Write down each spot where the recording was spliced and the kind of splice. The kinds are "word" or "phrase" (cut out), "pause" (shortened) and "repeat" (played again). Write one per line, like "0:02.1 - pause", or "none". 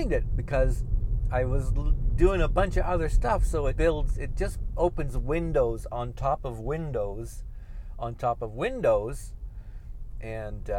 0:03.8 - word